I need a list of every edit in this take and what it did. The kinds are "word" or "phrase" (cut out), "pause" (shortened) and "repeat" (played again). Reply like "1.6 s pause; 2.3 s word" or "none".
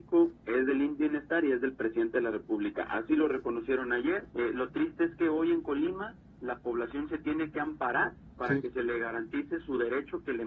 4.3 s pause; 8.3 s pause